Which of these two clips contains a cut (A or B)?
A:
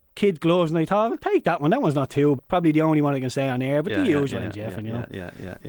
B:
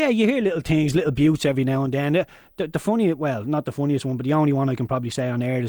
A